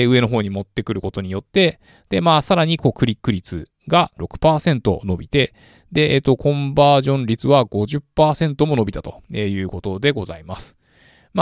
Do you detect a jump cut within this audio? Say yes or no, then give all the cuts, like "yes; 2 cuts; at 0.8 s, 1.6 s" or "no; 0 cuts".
yes; 1 cut; at 4.2 s